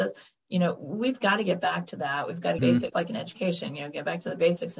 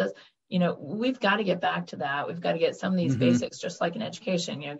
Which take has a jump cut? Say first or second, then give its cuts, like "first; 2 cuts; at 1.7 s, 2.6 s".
first; 2 cuts; at 2.6 s, 2.9 s